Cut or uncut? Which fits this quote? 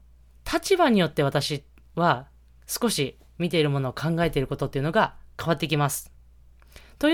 uncut